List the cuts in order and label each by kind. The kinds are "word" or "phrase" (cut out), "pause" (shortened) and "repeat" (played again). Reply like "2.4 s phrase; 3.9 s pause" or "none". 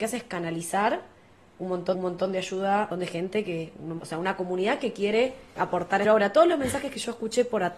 1.9 s repeat; 2.9 s phrase; 4.0 s phrase; 5.6 s word; 6.0 s phrase